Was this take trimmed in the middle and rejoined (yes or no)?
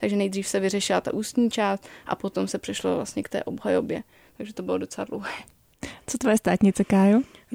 no